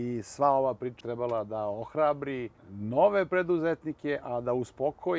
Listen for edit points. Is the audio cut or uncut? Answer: cut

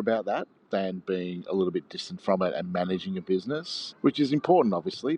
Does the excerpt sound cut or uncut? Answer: cut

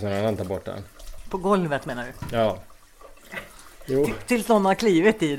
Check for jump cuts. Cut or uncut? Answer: uncut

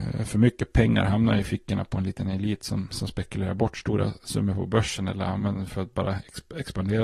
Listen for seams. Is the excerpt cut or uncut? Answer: uncut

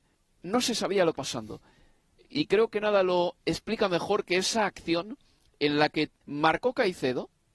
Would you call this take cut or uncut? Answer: cut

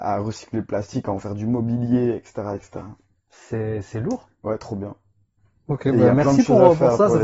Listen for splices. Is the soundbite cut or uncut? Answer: uncut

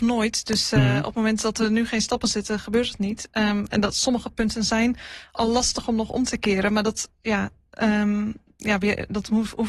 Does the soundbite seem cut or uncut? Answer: uncut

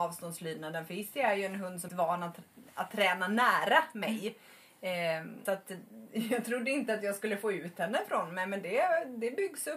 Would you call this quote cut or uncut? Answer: cut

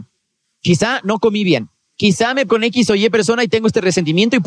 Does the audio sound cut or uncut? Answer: cut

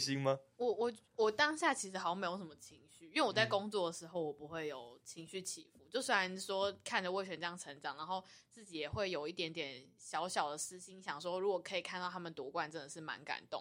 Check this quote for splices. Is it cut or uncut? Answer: uncut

